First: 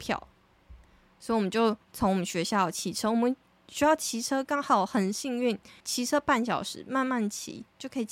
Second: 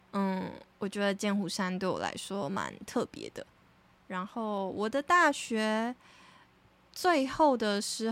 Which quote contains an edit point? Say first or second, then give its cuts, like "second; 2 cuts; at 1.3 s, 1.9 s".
first; 2 cuts; at 1.8 s, 5.8 s